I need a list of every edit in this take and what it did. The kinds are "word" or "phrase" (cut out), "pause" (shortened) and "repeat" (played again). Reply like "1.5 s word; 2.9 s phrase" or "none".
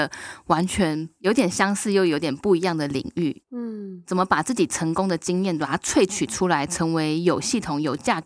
3.5 s pause

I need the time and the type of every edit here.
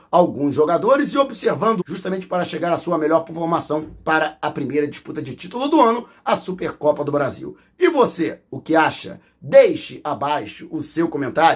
1.8 s word

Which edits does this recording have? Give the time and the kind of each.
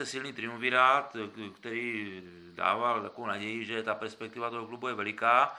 none

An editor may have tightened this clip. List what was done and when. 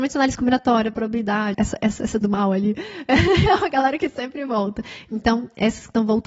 1.5 s word; 2.2 s word

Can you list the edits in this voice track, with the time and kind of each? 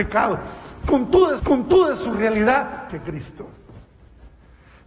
1.4 s repeat; 2.9 s word

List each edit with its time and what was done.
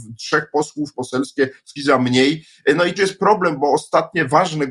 0.9 s phrase; 1.8 s word; 3.0 s word

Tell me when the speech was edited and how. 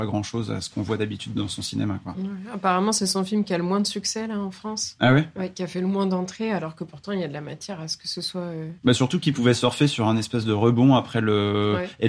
8.8 s pause

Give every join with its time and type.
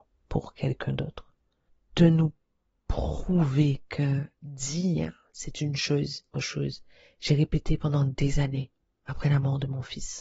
6.3 s phrase

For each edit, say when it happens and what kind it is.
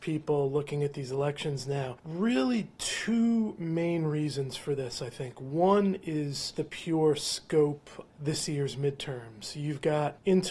6.5 s word; 8.1 s word

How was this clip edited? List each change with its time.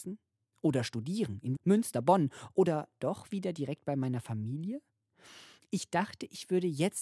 1.6 s word

